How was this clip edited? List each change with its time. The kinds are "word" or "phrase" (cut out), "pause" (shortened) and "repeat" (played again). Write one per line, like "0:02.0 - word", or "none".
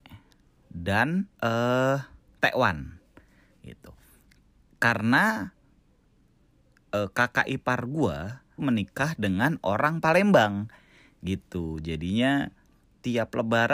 0:01.3 - pause
0:08.6 - word

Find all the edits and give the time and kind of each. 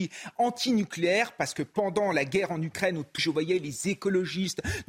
0:03.2 - word

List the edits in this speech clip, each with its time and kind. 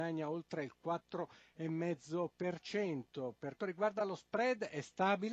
0:03.6 - word

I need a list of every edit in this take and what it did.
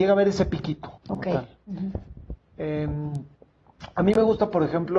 0:01.0 - pause

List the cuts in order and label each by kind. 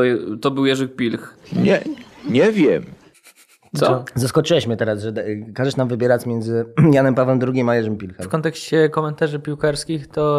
none

